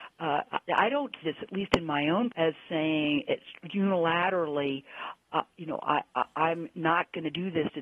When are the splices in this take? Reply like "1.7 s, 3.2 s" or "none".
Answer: 1.2 s, 2.3 s